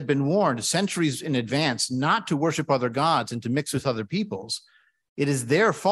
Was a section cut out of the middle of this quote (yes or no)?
no